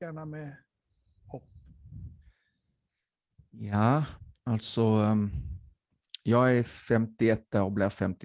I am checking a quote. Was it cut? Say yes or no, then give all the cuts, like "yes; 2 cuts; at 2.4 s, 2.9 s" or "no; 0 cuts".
no; 0 cuts